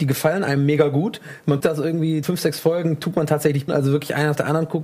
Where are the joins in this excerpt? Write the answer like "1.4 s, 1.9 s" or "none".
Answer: 1.6 s, 2.2 s, 3.7 s